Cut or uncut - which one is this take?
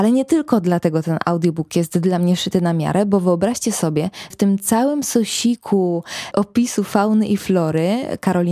cut